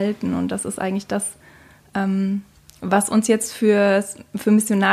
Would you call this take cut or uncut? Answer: uncut